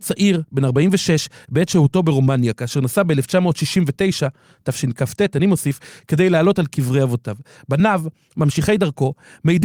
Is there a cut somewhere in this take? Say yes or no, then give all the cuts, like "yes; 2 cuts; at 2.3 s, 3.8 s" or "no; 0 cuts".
no; 0 cuts